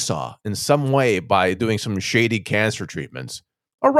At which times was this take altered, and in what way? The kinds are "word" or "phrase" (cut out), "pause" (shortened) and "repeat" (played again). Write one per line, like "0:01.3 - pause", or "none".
none